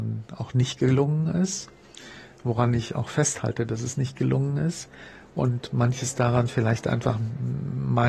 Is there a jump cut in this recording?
no; 0 cuts

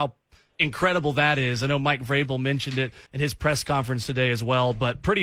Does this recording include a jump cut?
yes; 1 cut; at 3.1 s

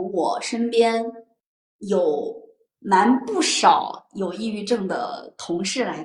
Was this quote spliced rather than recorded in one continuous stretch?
no; 0 cuts

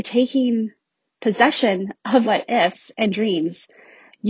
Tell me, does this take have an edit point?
yes; 1 cut; at 2.2 s

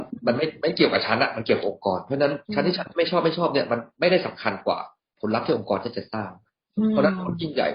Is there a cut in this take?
yes; 1 cut; at 2.4 s

